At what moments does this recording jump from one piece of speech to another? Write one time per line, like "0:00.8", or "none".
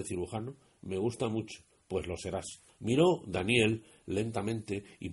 none